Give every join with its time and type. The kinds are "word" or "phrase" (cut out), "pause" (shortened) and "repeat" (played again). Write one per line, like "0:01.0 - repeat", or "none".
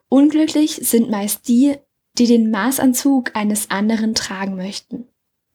none